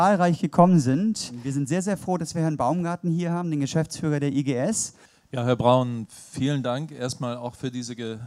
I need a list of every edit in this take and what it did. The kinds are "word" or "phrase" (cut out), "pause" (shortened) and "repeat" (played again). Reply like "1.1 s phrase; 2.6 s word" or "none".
none